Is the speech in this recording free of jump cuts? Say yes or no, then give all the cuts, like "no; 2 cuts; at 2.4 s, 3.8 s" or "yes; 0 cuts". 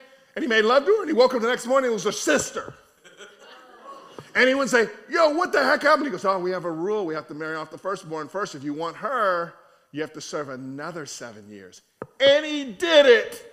yes; 0 cuts